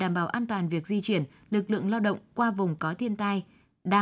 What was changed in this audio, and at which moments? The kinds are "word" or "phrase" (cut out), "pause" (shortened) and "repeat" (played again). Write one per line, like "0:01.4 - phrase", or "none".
none